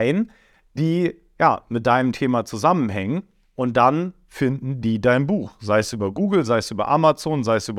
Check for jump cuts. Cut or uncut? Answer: uncut